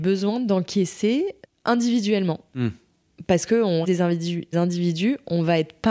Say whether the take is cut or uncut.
cut